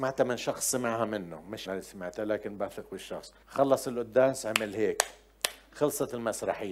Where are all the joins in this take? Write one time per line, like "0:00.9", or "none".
0:01.7
0:03.4